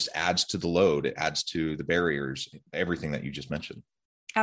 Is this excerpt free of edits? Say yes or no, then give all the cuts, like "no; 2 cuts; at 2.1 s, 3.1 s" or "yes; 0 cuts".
yes; 0 cuts